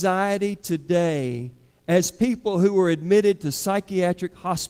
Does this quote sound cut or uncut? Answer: uncut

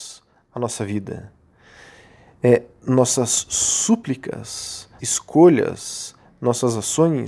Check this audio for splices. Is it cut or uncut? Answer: cut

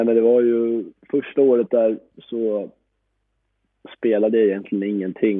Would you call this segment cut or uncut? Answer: uncut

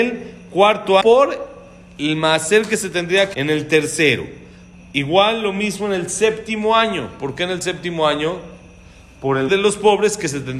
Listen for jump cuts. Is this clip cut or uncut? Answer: cut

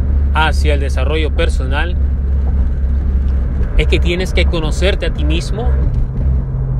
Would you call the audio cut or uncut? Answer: uncut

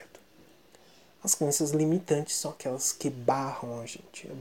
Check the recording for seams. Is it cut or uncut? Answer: uncut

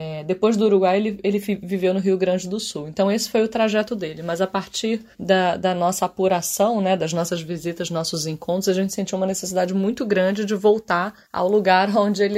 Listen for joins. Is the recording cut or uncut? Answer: cut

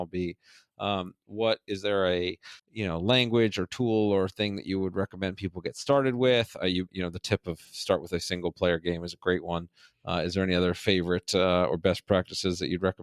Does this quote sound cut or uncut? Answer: cut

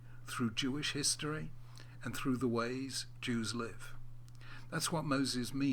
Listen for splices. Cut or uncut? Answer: uncut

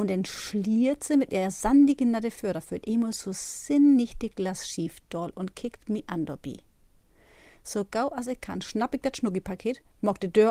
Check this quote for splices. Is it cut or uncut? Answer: uncut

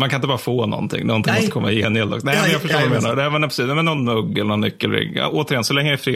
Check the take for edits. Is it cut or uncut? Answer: uncut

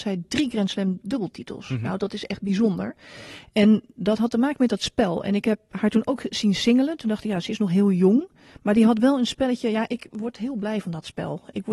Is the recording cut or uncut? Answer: uncut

